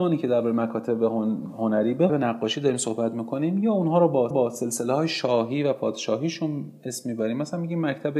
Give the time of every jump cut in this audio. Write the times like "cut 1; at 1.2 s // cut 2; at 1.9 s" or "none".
cut 1; at 2.1 s // cut 2; at 4.3 s

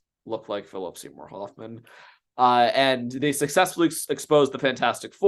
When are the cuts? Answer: none

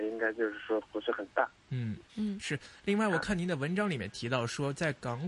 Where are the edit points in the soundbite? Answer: cut 1; at 2.1 s

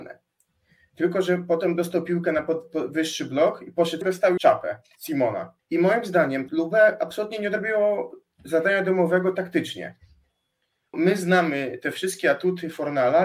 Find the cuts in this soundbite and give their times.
cut 1; at 4.0 s // cut 2; at 4.4 s // cut 3; at 5.6 s // cut 4; at 6.5 s // cut 5; at 10.9 s

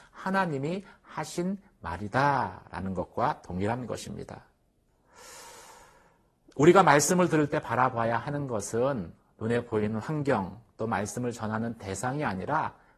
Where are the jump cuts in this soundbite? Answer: none

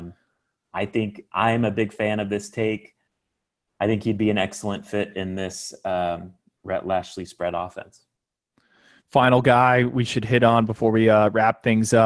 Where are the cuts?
none

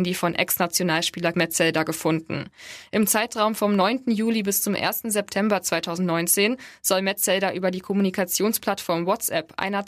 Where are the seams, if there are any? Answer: cut 1; at 1.3 s

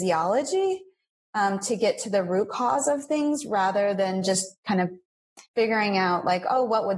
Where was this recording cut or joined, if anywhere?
cut 1; at 5.5 s

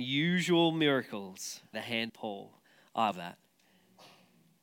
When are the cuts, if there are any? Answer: cut 1; at 1.7 s // cut 2; at 2.1 s // cut 3; at 3.1 s

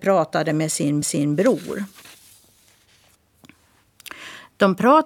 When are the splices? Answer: cut 1; at 1.0 s

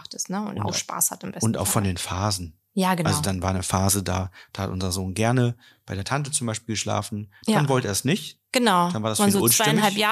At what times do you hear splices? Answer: none

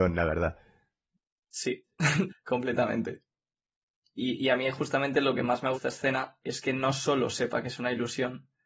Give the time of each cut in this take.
cut 1; at 2.3 s // cut 2; at 5.7 s

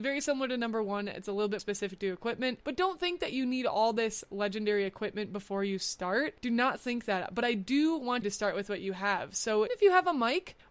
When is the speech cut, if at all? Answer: cut 1; at 1.6 s // cut 2; at 8.2 s // cut 3; at 9.7 s

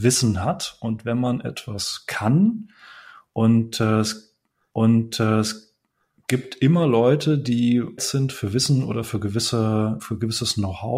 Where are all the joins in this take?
cut 1; at 4.7 s // cut 2; at 8.0 s // cut 3; at 10.0 s

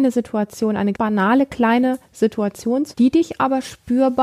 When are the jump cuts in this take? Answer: cut 1; at 0.9 s // cut 2; at 2.9 s

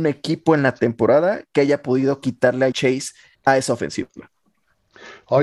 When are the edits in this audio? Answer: cut 1; at 2.7 s // cut 2; at 3.3 s

